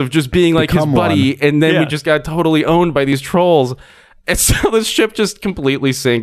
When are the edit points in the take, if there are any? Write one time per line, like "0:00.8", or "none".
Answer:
none